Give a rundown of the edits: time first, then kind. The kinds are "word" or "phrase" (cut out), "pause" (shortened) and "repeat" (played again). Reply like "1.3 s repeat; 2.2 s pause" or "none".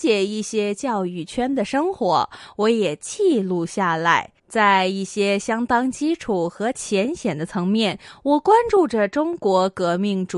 4.4 s pause